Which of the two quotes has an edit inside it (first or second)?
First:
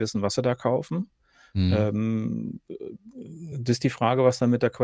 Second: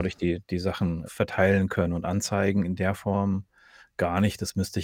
second